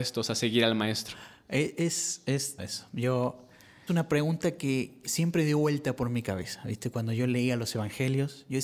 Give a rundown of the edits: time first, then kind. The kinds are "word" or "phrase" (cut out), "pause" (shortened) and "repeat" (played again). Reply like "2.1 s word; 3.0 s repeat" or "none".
2.6 s word; 3.9 s word; 5.0 s word